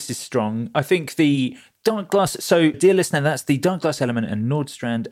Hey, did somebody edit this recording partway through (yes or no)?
yes